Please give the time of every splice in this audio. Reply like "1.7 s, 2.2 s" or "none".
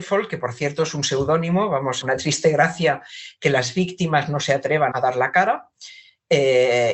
2.0 s, 4.9 s